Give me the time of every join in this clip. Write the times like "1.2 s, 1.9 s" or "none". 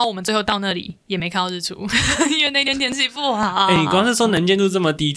1.0 s